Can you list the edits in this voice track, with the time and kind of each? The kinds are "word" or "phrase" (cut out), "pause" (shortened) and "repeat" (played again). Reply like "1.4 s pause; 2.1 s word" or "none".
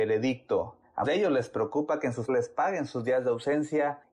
1.0 s word; 2.3 s phrase